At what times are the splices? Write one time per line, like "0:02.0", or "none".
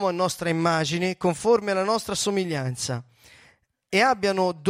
none